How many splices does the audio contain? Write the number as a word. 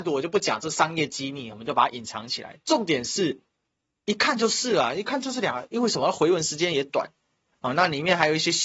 one